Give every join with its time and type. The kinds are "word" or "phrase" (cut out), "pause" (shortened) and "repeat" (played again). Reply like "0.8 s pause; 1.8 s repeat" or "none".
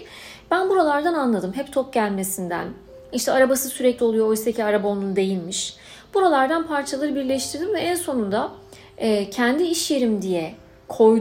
4.0 s word